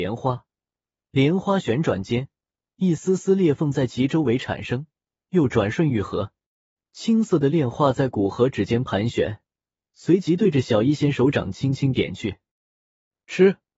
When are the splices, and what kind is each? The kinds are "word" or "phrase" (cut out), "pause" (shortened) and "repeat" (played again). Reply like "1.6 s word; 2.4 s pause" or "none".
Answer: none